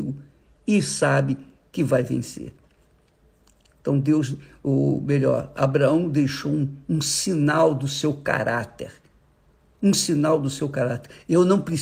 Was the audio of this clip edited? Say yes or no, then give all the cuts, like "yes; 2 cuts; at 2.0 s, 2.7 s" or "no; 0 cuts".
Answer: no; 0 cuts